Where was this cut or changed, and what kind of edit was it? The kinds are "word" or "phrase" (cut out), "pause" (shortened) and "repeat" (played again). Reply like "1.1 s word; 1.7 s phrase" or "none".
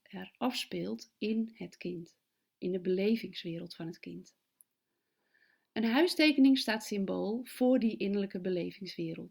none